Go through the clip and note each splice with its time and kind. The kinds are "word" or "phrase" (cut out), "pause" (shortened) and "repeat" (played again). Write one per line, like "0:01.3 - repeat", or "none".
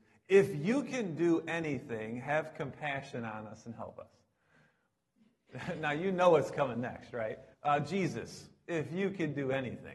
0:07.5 - pause